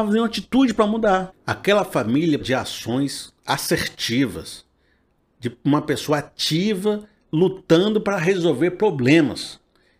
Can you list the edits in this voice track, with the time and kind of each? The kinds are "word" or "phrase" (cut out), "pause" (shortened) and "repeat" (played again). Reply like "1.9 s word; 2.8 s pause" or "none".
2.4 s word; 3.4 s pause